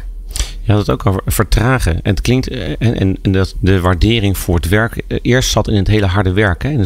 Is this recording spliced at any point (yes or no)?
yes